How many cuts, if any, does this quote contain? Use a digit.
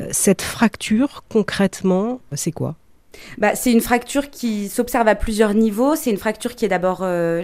0